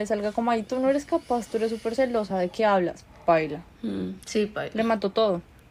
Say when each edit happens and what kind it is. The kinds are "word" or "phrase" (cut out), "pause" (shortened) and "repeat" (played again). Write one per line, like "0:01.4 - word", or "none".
none